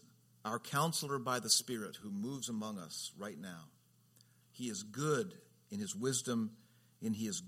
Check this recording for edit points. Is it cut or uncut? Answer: uncut